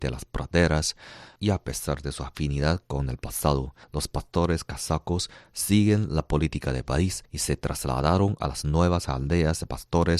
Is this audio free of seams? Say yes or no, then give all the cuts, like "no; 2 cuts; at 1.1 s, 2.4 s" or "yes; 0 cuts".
no; 2 cuts; at 3.8 s, 7.3 s